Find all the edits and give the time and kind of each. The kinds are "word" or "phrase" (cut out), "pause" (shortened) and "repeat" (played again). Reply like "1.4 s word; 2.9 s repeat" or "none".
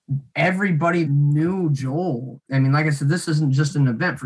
1.0 s word